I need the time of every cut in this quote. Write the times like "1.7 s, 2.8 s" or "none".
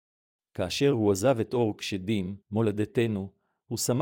2.4 s